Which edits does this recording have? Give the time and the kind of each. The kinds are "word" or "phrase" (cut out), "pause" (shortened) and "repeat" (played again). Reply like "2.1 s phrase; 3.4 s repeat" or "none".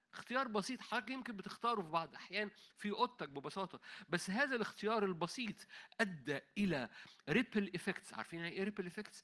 none